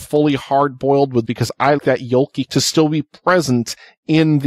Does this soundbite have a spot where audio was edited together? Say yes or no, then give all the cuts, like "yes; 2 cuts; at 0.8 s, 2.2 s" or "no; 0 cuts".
yes; 3 cuts; at 1.2 s, 1.8 s, 2.5 s